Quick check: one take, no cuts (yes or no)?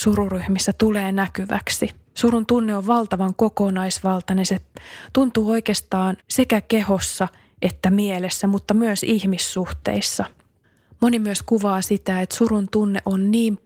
no